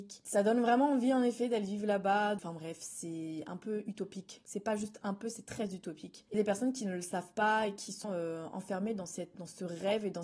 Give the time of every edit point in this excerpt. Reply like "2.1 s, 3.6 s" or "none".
6.3 s, 8.0 s, 9.3 s